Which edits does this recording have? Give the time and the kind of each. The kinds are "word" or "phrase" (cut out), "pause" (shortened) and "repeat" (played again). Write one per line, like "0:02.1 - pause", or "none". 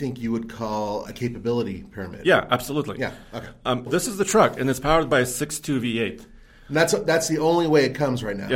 0:01.1 - word
0:03.9 - word